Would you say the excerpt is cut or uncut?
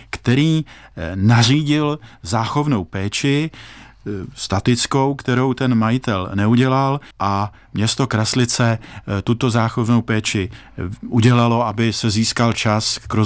cut